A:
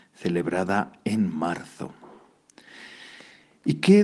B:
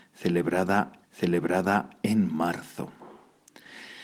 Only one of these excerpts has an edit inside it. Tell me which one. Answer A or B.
B